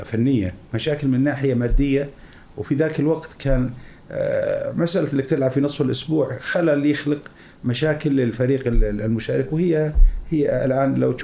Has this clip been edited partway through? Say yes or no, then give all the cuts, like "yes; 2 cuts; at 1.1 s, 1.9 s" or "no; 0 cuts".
no; 0 cuts